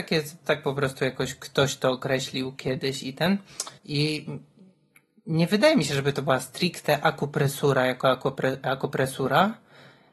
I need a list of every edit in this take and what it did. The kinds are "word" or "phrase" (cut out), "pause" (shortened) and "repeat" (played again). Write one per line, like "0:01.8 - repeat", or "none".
0:03.8 - pause